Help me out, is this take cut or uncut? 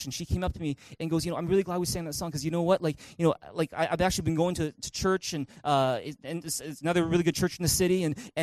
uncut